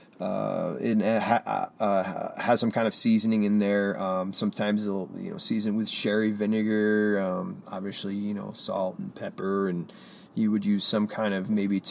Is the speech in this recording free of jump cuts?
yes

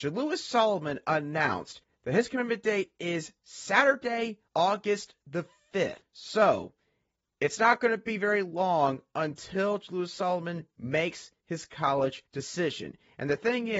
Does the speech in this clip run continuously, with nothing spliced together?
no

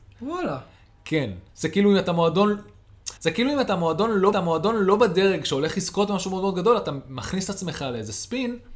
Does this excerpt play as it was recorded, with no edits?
no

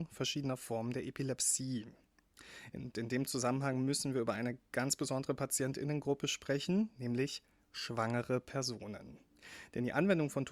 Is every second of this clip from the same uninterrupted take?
yes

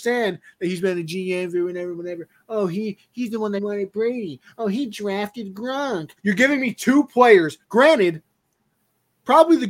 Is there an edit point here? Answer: yes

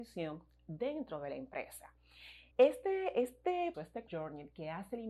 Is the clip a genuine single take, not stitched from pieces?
no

